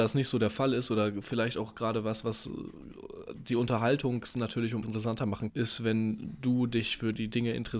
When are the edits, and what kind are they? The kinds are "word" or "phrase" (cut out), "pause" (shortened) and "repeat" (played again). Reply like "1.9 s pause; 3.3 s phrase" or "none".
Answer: 4.8 s word; 5.5 s word